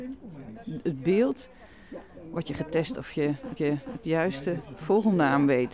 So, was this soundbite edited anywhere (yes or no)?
yes